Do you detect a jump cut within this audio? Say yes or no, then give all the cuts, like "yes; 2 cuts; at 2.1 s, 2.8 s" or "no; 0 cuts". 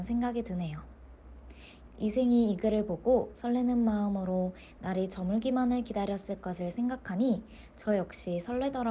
no; 0 cuts